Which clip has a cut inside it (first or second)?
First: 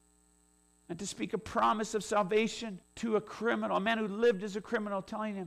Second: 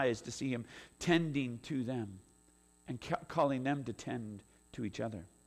first